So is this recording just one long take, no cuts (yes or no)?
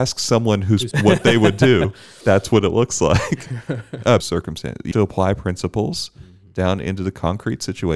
no